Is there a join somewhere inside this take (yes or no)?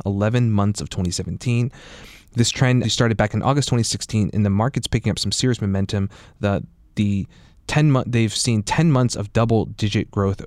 yes